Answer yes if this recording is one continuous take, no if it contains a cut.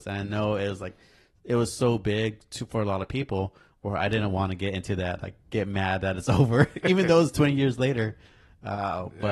yes